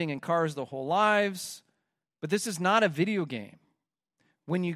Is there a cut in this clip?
no; 0 cuts

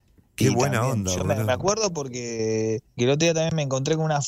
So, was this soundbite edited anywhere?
yes; 1 cut; at 3.0 s

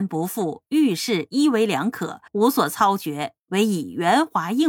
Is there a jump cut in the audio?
yes; 1 cut; at 2.3 s

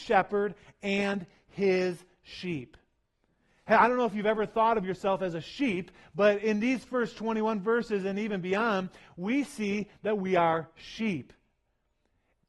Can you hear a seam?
no; 0 cuts

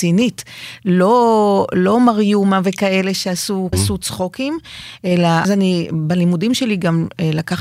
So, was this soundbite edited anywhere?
yes; 2 cuts; at 3.7 s, 5.4 s

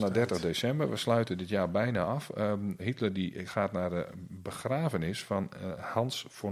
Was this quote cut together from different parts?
yes; 1 cut; at 2.8 s

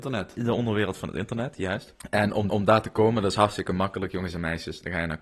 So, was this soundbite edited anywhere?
yes; 1 cut; at 2.5 s

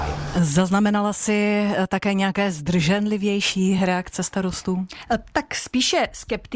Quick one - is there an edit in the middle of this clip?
no; 0 cuts

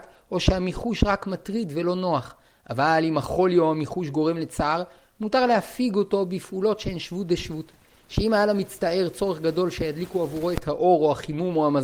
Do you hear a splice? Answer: no; 0 cuts

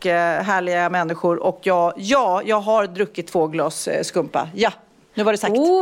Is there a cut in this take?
no; 0 cuts

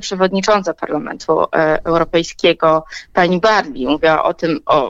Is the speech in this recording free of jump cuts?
yes; 0 cuts

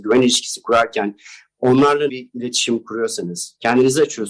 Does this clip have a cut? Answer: yes; 1 cut; at 2.1 s

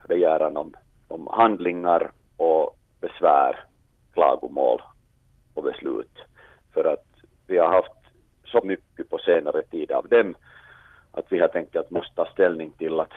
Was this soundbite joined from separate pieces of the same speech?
yes; 1 cut; at 8.6 s

